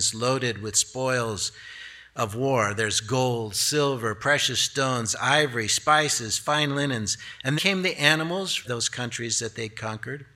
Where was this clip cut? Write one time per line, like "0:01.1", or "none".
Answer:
0:07.6
0:08.6